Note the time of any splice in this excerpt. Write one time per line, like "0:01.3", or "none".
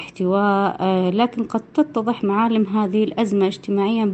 none